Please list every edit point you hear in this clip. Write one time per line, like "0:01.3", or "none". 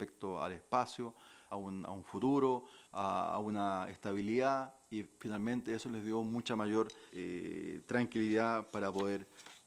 0:01.5
0:02.8
0:07.1